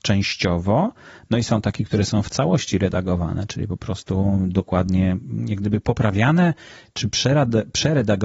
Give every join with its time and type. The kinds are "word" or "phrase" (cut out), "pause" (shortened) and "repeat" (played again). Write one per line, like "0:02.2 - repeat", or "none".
none